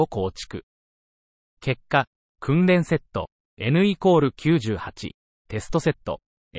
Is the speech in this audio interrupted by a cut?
no; 0 cuts

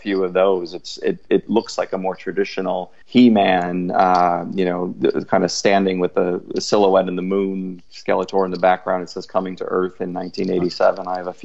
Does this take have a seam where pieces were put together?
yes; 1 cut; at 3.0 s

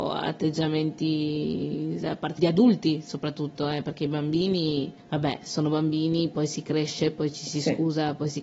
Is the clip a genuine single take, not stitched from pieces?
no; 3 cuts; at 2.0 s, 2.4 s, 5.0 s

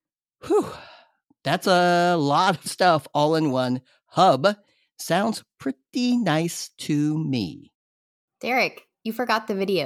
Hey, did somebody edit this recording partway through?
yes; 1 cut; at 2.6 s

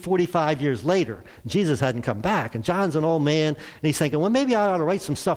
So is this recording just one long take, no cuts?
yes; 0 cuts

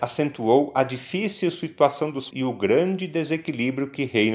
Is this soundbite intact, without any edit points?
no; 1 cut; at 2.3 s

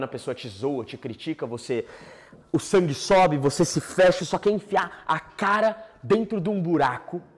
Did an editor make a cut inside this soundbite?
yes; 1 cut; at 4.2 s

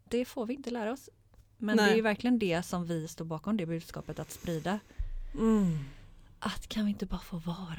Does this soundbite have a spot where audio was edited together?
no; 0 cuts

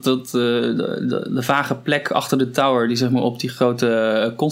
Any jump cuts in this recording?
no; 0 cuts

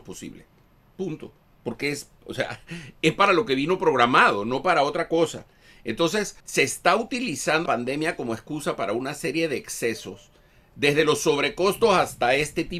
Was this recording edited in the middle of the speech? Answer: yes; 2 cuts; at 6.4 s, 7.7 s

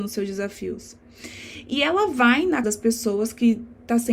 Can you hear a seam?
yes; 1 cut; at 2.6 s

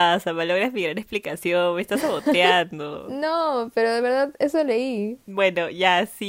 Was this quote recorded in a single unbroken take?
yes; 0 cuts

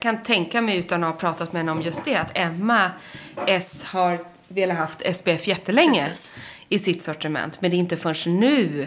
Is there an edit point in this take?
no; 0 cuts

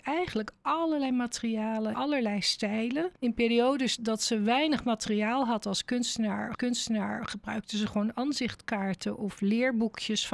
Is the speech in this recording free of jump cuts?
no; 4 cuts; at 1.9 s, 3.2 s, 4.0 s, 6.5 s

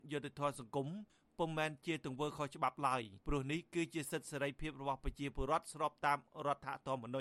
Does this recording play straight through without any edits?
no; 1 cut; at 3.2 s

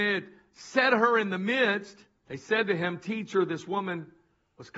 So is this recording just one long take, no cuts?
yes; 0 cuts

